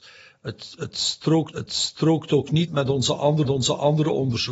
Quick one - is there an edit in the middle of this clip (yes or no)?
yes